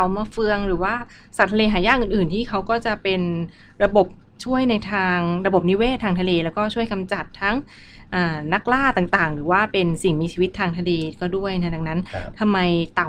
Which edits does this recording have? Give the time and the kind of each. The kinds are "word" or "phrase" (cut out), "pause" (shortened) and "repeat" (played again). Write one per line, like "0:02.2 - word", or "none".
none